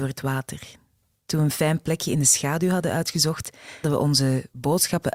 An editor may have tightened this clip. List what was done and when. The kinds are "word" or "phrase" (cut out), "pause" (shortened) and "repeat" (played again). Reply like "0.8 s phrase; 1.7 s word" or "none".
3.8 s word